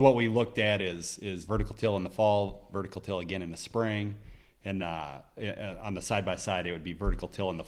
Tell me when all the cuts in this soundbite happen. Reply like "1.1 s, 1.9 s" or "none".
1.5 s, 2.7 s, 4.8 s